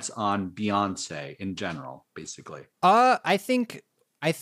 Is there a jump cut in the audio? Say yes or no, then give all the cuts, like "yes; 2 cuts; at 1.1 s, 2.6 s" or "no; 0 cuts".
yes; 1 cut; at 2.7 s